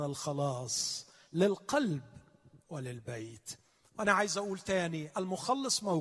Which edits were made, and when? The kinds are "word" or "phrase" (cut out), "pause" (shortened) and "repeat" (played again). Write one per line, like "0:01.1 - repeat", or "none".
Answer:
none